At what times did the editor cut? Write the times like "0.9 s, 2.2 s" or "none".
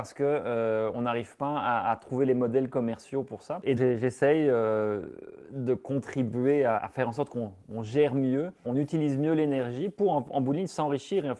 3.8 s, 6.8 s, 8.6 s